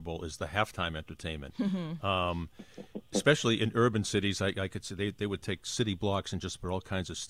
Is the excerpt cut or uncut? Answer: uncut